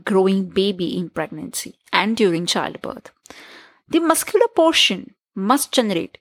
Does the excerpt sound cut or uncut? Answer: uncut